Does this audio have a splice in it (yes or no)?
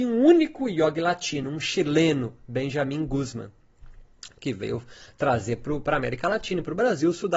no